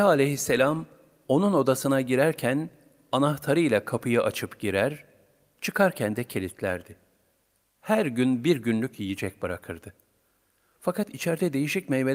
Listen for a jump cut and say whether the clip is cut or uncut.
uncut